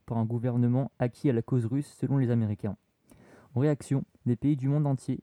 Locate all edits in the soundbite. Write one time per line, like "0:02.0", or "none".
none